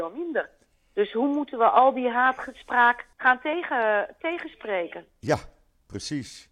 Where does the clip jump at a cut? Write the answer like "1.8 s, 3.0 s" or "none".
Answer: 3.1 s